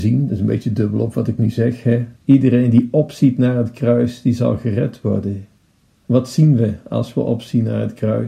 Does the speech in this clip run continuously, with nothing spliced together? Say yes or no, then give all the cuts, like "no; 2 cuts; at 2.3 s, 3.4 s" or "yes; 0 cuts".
no; 1 cut; at 2.2 s